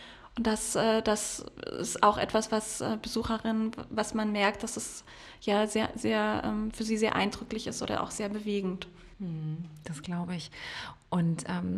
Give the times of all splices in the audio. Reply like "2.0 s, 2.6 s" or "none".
none